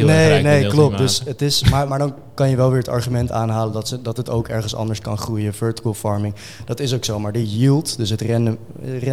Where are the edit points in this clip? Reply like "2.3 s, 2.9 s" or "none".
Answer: 1.9 s